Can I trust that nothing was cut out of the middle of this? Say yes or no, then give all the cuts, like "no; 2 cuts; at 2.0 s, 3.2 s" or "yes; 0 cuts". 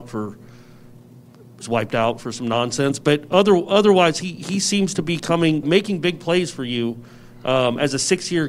no; 1 cut; at 5.6 s